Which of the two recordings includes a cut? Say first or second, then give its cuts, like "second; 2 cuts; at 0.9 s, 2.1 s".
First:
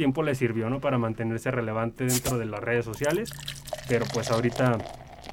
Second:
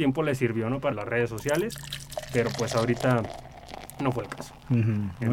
second; 1 cut; at 0.9 s